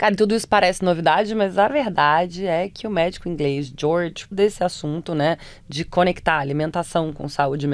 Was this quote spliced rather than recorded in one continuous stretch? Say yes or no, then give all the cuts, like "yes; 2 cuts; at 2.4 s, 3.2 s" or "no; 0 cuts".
yes; 1 cut; at 4.3 s